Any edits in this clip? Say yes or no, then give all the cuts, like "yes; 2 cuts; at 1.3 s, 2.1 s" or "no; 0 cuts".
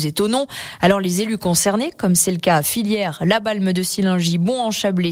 no; 0 cuts